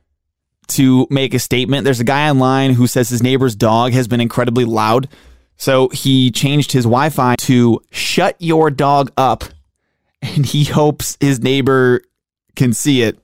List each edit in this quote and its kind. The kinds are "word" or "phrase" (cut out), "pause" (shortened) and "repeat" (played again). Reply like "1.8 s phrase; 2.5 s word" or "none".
7.3 s word